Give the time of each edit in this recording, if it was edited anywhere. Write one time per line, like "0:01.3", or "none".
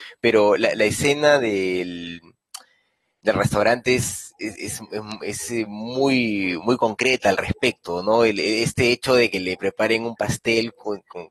none